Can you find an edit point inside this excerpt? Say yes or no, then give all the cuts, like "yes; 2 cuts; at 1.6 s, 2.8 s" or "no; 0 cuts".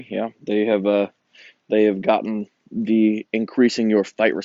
no; 0 cuts